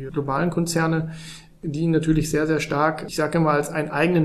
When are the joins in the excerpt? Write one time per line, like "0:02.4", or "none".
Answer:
none